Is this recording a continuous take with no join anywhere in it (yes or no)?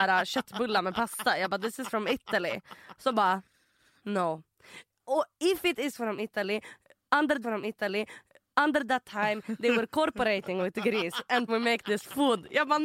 no